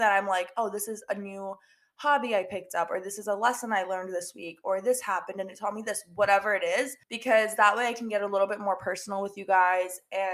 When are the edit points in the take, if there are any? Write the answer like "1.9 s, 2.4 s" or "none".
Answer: 7.0 s